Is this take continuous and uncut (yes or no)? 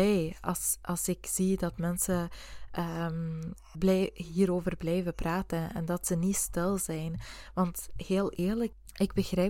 no